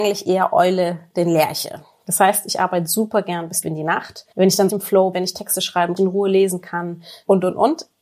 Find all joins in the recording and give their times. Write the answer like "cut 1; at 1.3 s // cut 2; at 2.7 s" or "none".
cut 1; at 3.6 s // cut 2; at 4.3 s // cut 3; at 4.7 s // cut 4; at 5.1 s // cut 5; at 6.0 s